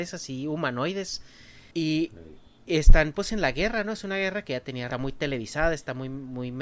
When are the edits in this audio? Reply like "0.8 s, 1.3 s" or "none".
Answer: 1.7 s, 4.9 s